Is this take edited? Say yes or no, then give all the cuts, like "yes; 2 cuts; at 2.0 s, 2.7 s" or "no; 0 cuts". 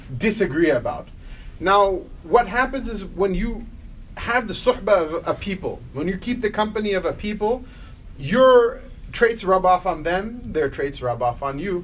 no; 0 cuts